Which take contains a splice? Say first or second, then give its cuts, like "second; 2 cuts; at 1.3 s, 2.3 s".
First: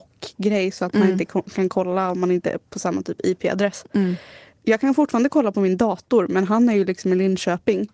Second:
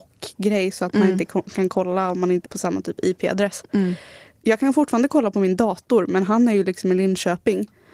second; 1 cut; at 2.4 s